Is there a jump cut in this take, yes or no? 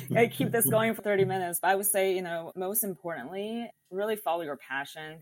yes